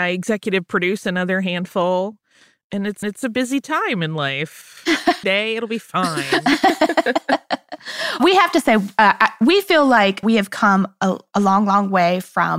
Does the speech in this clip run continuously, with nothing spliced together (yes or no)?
no